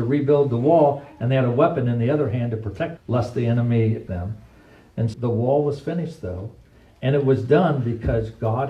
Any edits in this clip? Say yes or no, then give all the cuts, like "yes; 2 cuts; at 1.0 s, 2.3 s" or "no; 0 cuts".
yes; 3 cuts; at 3.0 s, 4.1 s, 5.1 s